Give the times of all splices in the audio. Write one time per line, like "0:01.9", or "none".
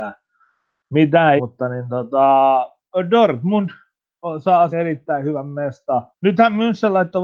0:01.4
0:04.7
0:06.1